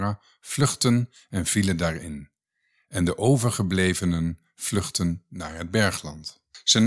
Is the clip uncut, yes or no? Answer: yes